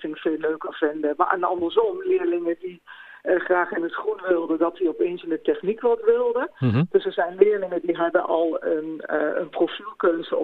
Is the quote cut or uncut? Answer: uncut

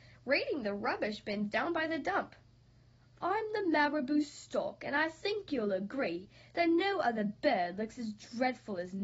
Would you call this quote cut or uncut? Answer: uncut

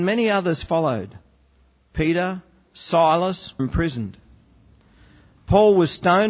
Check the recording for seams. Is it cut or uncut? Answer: cut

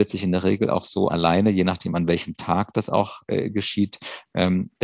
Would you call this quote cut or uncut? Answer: cut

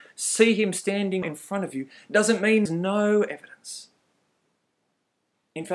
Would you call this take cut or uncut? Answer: cut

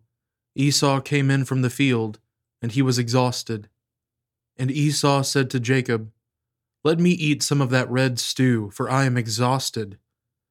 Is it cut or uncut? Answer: uncut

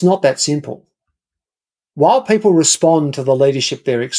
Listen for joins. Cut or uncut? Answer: uncut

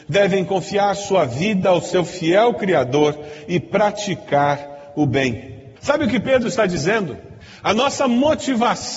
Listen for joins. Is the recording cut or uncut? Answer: uncut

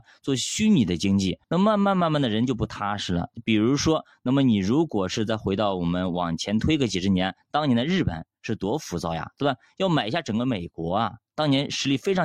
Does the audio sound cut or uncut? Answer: cut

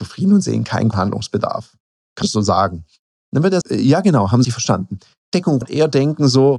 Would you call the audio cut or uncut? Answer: cut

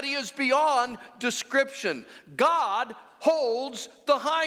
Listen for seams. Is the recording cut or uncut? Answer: uncut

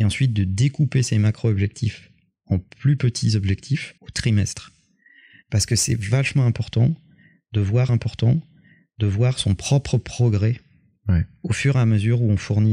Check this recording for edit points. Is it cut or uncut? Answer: cut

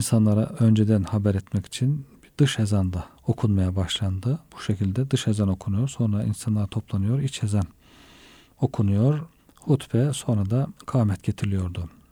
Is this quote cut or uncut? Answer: cut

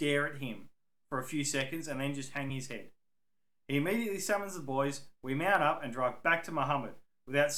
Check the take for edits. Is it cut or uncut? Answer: uncut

